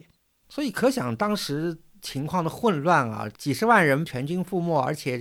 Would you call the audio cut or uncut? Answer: uncut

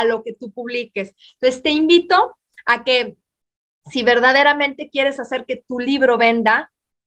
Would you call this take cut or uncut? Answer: uncut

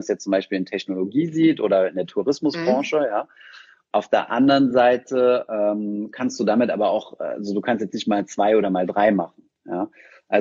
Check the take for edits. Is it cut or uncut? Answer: uncut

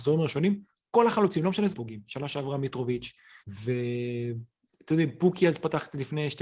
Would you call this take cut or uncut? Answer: cut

